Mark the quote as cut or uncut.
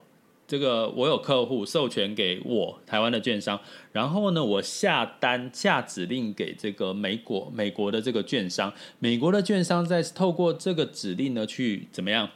uncut